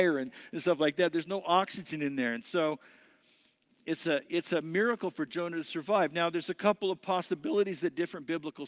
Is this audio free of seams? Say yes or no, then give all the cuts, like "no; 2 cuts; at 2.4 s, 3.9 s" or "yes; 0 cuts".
yes; 0 cuts